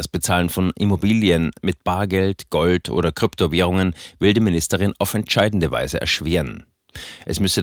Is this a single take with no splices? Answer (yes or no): yes